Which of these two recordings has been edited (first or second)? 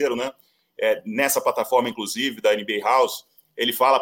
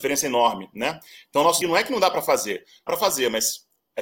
second